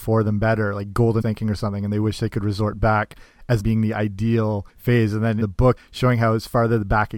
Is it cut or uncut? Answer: cut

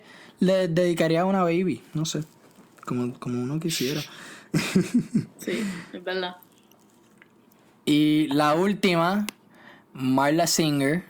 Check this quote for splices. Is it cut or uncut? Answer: uncut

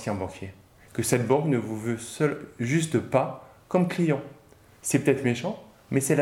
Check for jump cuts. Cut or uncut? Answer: uncut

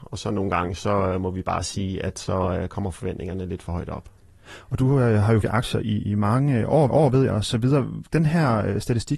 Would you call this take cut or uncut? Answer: cut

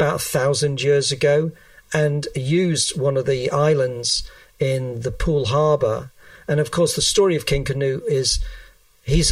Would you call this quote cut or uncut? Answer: uncut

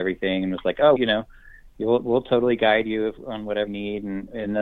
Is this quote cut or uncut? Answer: cut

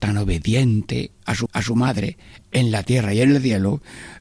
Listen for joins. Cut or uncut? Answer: cut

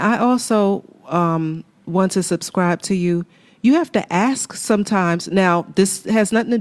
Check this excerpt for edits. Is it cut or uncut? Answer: uncut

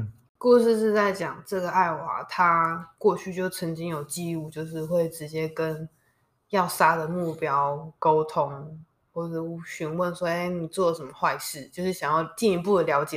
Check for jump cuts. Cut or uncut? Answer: uncut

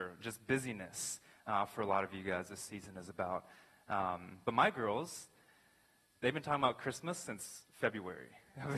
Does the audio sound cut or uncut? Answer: uncut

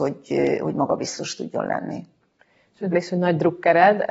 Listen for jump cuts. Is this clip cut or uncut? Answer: cut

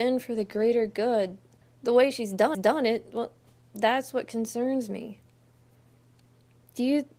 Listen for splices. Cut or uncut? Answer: cut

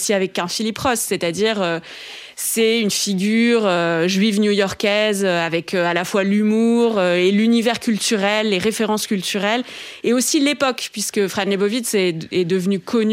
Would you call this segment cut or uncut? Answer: uncut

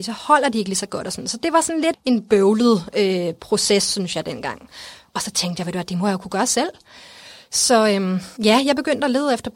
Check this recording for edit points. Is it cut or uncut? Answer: cut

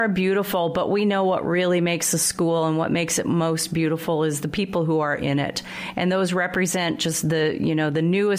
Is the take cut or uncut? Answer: uncut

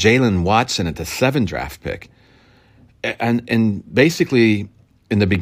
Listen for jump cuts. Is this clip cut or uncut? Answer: cut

